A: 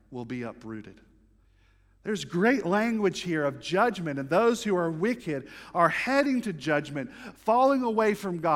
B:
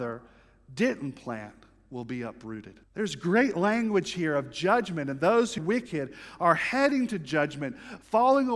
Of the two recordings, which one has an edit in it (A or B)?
B